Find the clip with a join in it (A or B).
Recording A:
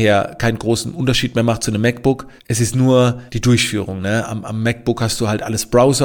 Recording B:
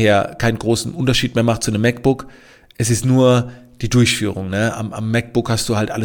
A